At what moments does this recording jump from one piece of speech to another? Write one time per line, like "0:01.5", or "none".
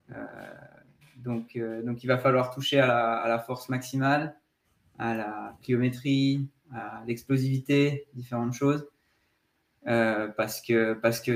none